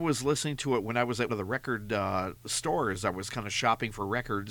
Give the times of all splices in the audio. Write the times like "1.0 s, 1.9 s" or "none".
1.3 s